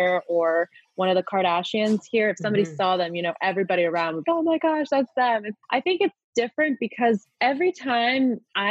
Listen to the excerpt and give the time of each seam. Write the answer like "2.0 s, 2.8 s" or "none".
4.2 s, 5.6 s